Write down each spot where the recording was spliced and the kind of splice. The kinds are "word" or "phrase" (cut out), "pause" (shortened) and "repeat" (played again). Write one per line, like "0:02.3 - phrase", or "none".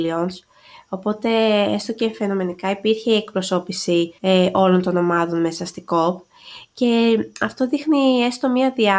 0:04.2 - pause